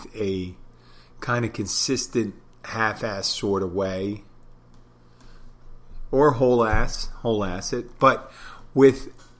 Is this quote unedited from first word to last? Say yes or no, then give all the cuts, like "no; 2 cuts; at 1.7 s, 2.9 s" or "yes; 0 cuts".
yes; 0 cuts